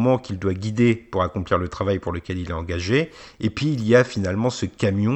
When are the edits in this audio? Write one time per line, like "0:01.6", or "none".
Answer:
none

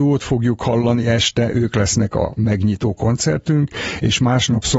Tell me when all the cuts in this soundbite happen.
none

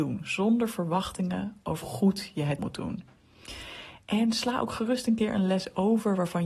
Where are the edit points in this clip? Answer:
0:01.8
0:02.6

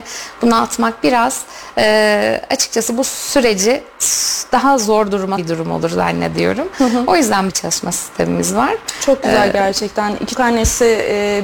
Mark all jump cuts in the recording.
0:05.4
0:07.5
0:10.3

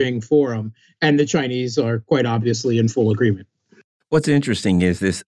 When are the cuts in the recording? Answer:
none

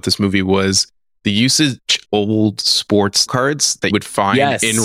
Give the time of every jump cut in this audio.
0:02.0
0:03.3
0:03.9

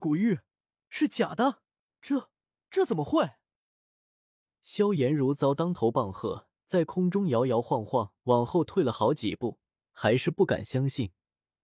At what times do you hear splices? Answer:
0:01.9
0:06.5
0:08.2

